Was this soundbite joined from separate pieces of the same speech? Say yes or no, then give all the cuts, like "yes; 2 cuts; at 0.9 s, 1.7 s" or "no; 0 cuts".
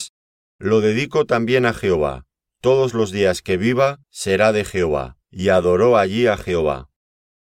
yes; 3 cuts; at 2.4 s, 4.0 s, 5.2 s